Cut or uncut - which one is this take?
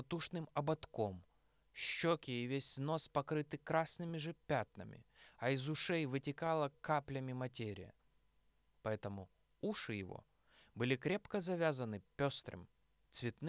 uncut